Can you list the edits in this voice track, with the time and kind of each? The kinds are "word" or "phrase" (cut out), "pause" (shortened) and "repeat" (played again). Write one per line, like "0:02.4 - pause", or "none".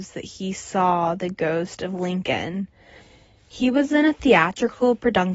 none